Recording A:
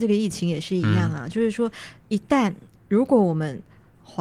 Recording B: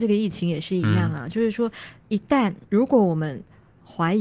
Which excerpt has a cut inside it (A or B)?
B